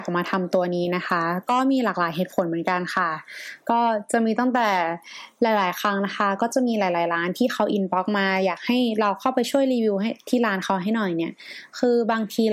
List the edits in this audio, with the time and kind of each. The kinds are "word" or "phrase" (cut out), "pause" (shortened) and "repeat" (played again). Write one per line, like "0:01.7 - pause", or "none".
none